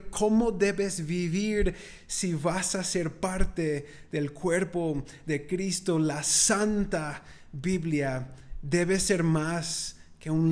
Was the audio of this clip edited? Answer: no; 0 cuts

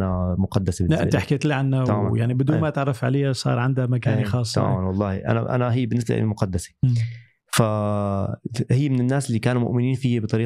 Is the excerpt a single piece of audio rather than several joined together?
yes; 0 cuts

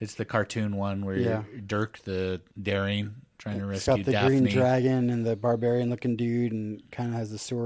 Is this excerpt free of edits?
no; 1 cut; at 2.5 s

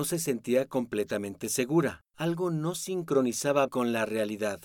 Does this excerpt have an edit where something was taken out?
yes; 2 cuts; at 2.1 s, 3.7 s

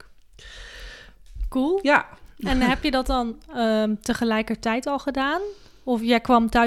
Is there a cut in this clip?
no; 0 cuts

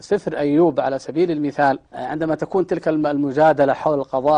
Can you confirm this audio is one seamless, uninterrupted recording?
no; 1 cut; at 1.9 s

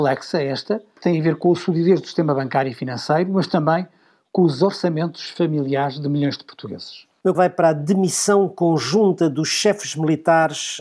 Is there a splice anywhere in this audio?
yes; 1 cut; at 7.3 s

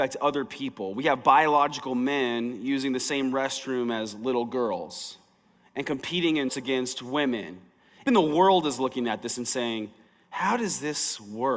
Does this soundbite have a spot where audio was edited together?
yes; 2 cuts; at 6.5 s, 8.1 s

